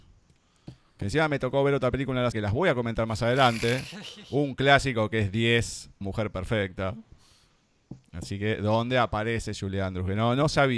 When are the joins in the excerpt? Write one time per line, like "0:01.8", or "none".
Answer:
0:02.3
0:06.0